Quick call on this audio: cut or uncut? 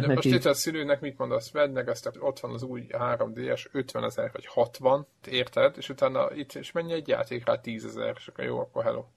cut